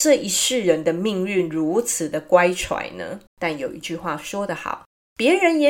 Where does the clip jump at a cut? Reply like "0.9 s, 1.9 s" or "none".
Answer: 3.3 s